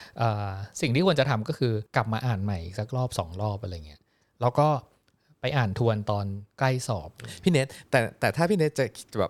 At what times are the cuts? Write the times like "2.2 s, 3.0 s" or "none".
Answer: 1.9 s